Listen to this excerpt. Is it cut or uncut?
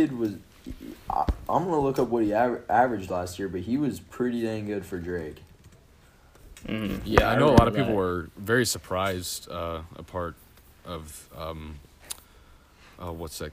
uncut